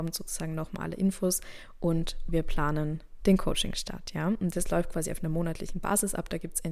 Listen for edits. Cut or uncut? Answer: uncut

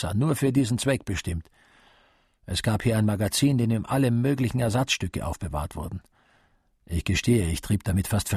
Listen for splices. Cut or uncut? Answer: uncut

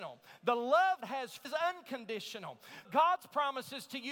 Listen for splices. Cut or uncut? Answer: cut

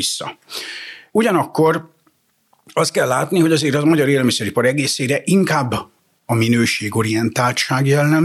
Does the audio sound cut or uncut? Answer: uncut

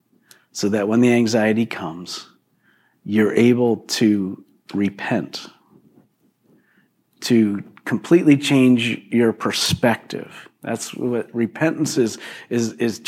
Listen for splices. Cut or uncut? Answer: uncut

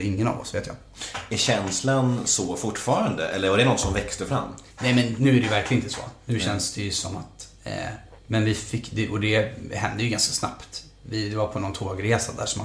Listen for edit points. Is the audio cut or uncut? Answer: cut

